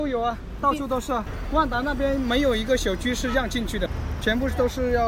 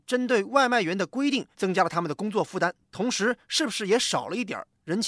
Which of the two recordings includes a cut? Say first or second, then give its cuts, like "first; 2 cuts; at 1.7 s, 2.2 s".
second; 1 cut; at 1.5 s